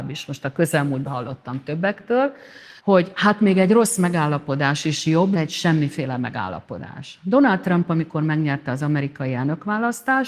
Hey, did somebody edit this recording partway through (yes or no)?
yes